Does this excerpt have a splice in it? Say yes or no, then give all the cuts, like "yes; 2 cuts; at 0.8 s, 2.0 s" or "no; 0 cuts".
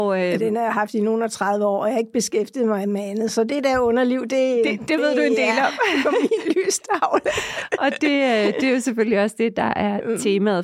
no; 0 cuts